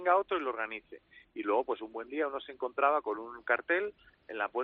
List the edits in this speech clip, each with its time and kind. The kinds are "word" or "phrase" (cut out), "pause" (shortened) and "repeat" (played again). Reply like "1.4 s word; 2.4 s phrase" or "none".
none

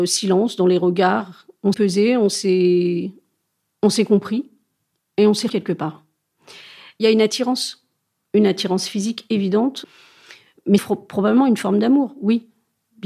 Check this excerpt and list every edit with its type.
1.7 s word; 5.5 s word; 10.8 s word

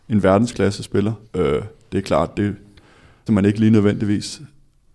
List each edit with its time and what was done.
1.2 s pause; 3.3 s word

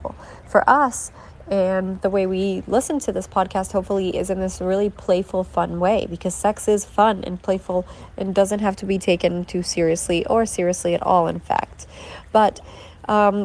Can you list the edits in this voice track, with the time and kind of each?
none

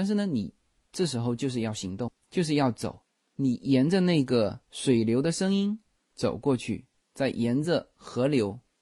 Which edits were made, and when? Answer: none

